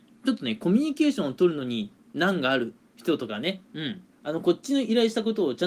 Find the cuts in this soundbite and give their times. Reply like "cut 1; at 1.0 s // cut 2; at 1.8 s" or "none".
cut 1; at 4.1 s